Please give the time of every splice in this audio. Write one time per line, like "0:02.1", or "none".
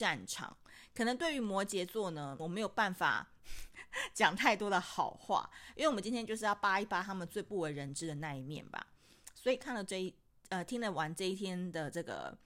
0:02.4